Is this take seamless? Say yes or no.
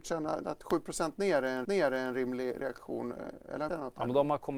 no